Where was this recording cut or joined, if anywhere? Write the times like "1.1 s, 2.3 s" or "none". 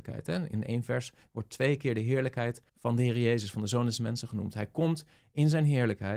2.7 s